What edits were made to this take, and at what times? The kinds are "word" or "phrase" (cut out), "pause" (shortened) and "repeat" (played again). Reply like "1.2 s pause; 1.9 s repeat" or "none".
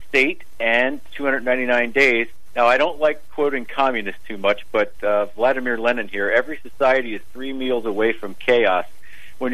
none